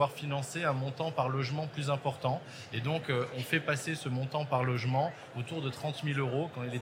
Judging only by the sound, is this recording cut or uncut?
uncut